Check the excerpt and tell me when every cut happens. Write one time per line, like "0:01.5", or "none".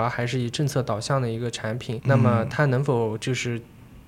0:02.0